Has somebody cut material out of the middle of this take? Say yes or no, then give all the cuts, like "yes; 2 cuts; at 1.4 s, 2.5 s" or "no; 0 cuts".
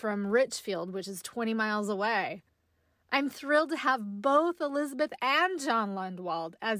no; 0 cuts